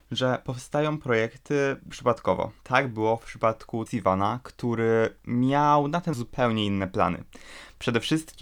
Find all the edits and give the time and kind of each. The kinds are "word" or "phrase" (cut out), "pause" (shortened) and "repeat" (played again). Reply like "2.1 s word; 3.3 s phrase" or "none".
1.9 s word; 2.6 s pause; 3.9 s word; 6.1 s word